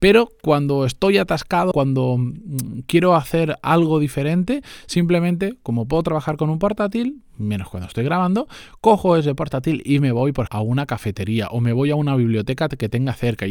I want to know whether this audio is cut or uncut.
cut